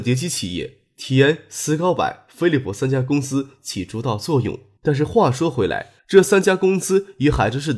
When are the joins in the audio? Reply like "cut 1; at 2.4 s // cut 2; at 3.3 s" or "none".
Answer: cut 1; at 4.8 s // cut 2; at 6.0 s